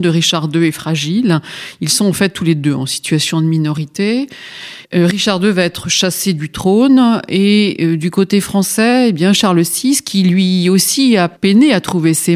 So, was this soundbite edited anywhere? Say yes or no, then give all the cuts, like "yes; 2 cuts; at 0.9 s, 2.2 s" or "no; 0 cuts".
yes; 2 cuts; at 4.8 s, 11.4 s